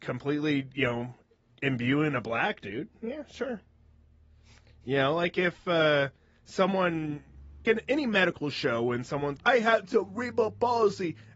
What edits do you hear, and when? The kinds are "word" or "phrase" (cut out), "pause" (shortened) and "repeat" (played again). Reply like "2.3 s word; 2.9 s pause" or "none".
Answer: 7.6 s word; 9.4 s word

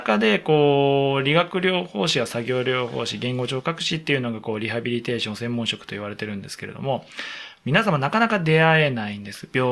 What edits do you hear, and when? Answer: none

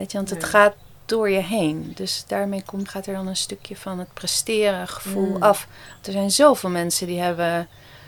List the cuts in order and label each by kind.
2.9 s word

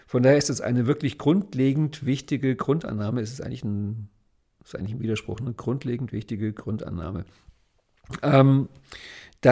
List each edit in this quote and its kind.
none

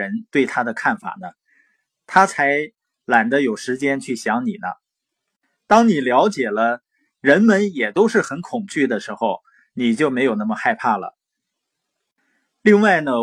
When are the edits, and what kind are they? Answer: none

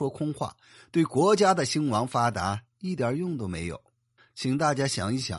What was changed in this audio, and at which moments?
none

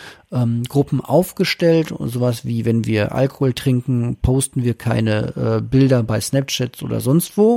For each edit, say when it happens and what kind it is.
none

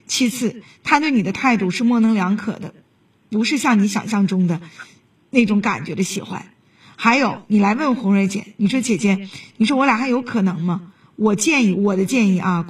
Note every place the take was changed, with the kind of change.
none

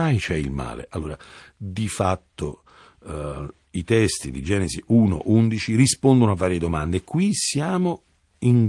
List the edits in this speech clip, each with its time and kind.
none

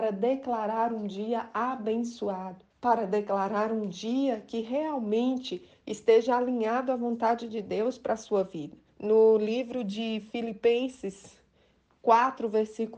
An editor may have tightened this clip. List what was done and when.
2.7 s pause; 8.9 s pause

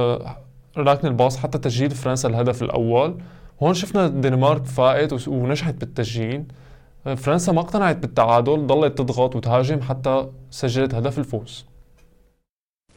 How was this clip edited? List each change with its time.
none

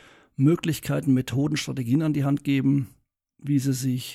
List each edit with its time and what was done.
none

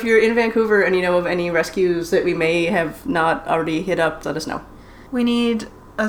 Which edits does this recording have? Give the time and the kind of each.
4.2 s word; 5.1 s pause

